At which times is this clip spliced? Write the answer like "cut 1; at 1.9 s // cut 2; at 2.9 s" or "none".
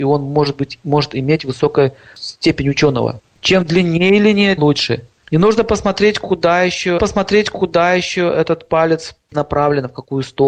cut 1; at 4.6 s // cut 2; at 7.0 s // cut 3; at 9.3 s